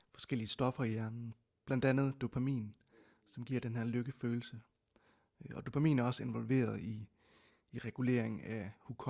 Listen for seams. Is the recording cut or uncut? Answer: uncut